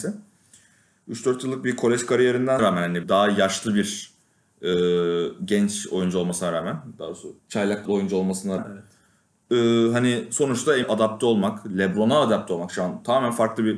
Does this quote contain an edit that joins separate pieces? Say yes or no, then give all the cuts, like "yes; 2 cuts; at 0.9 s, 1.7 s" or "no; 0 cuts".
yes; 6 cuts; at 2.6 s, 3.0 s, 7.4 s, 7.9 s, 8.6 s, 10.8 s